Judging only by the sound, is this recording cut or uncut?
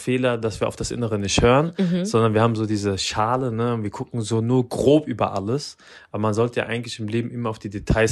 uncut